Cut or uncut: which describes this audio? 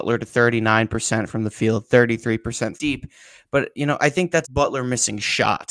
cut